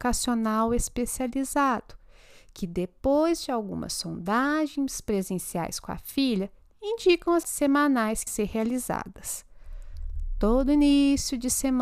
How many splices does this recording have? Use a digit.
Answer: 2